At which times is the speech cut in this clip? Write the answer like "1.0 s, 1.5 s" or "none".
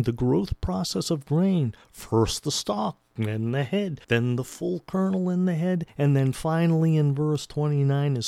4.0 s, 5.9 s